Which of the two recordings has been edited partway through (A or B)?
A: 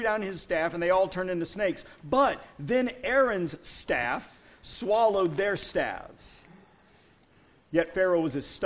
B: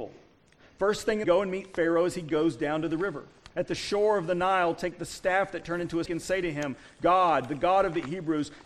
B